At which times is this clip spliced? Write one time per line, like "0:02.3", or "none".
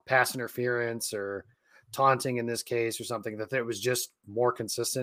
none

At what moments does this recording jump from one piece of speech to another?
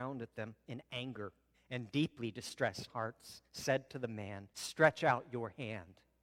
0:01.5
0:02.9
0:03.4
0:04.5

